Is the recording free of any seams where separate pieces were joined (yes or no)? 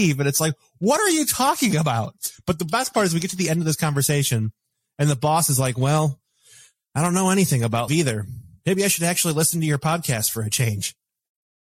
no